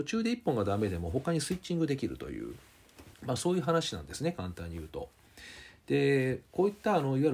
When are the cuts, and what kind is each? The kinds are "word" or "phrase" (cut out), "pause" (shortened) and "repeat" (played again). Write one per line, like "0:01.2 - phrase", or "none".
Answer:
0:03.1 - pause

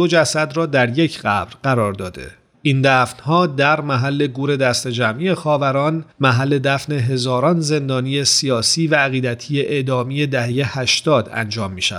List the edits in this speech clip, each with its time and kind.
0:02.5 - pause

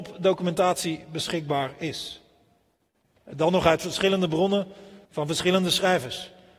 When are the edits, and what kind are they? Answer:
0:05.0 - pause

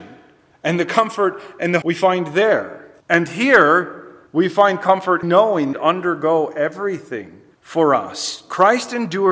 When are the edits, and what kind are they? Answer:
0:01.8 - word
0:03.0 - pause
0:04.3 - pause
0:05.2 - word
0:05.7 - phrase
0:07.5 - pause

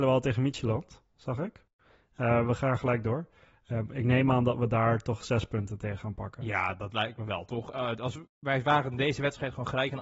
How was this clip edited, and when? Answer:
0:08.3 - pause

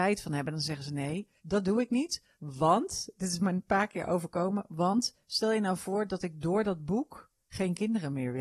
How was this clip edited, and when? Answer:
0:01.4 - pause
0:02.3 - pause

